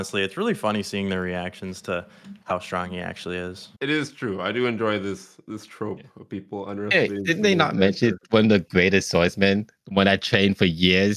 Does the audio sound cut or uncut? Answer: cut